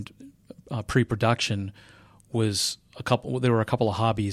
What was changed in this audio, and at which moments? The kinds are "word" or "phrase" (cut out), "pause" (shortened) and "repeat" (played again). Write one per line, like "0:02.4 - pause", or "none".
none